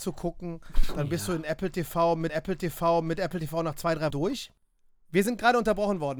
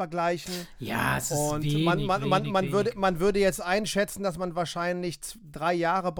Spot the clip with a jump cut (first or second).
first